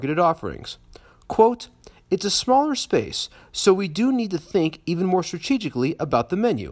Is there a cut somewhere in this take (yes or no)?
no